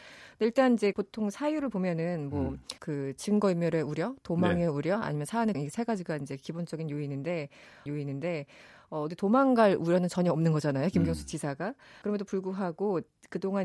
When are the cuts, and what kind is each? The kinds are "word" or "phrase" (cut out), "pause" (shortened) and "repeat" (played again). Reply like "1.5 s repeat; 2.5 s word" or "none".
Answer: 0.9 s word; 2.8 s pause; 5.5 s word; 7.9 s repeat; 12.0 s word